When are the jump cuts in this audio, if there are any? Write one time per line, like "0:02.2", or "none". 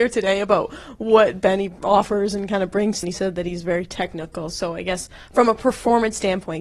0:03.0